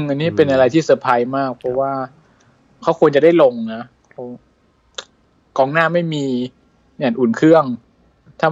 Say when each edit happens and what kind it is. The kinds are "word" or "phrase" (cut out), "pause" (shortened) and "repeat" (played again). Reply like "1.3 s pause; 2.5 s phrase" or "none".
none